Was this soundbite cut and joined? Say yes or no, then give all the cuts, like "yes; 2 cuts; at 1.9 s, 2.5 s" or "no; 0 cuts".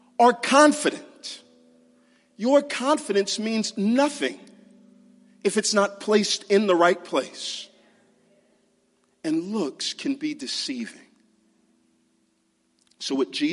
no; 0 cuts